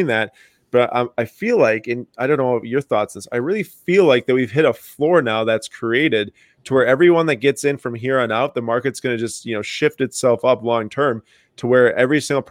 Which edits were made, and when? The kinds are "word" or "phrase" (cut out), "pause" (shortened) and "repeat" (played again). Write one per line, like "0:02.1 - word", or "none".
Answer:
none